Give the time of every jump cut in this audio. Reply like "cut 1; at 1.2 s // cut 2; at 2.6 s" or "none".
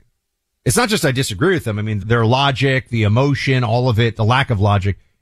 cut 1; at 2.0 s